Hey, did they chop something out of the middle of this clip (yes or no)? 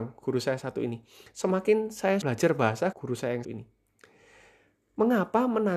yes